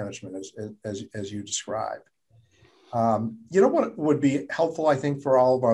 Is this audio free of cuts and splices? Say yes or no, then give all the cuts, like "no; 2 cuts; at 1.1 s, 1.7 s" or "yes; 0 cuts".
yes; 0 cuts